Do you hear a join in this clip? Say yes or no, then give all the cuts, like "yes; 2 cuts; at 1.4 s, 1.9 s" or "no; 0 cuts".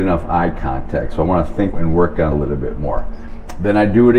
yes; 2 cuts; at 1.7 s, 2.3 s